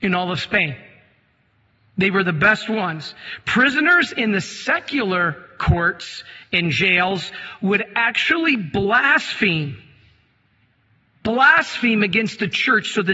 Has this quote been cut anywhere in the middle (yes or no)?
no